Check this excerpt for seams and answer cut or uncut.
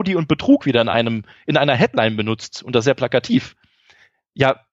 uncut